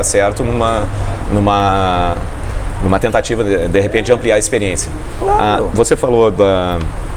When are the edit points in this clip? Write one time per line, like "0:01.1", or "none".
none